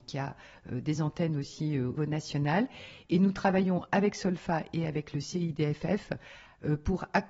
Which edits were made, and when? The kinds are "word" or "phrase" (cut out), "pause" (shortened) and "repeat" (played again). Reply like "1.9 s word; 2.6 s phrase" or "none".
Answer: 2.0 s word